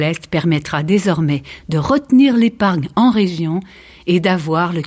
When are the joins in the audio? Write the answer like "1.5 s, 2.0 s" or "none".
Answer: none